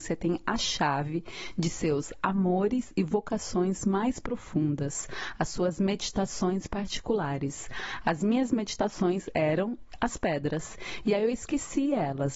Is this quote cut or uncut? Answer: uncut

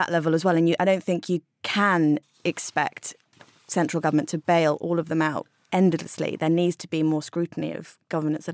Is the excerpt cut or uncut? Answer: uncut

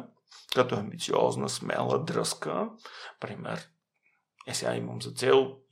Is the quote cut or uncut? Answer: uncut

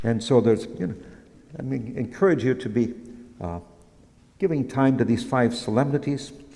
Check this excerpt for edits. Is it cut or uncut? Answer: uncut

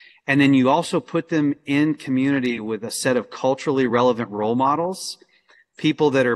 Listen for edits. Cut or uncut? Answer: uncut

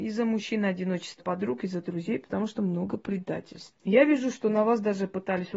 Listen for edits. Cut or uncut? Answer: cut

